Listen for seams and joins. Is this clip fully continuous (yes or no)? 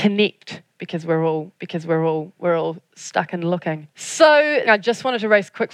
no